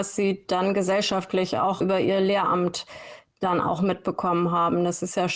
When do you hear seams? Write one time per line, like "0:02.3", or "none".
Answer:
0:01.8